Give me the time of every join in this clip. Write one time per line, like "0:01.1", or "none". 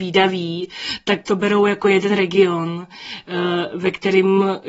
0:01.2